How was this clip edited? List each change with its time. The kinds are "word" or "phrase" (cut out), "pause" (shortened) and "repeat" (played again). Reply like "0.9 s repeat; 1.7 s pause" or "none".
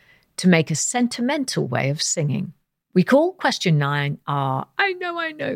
none